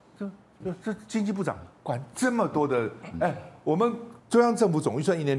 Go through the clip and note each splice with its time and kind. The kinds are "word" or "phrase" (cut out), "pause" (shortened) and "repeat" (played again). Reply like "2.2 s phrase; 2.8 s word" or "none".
4.2 s pause